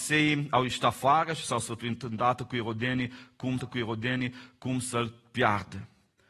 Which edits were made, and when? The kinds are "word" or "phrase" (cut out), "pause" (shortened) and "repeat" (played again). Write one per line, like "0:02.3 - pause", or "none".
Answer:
0:03.6 - repeat